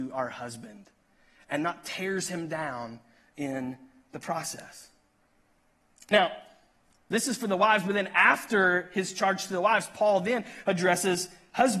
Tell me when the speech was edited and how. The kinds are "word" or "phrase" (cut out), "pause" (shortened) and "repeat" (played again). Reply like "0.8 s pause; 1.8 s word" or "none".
none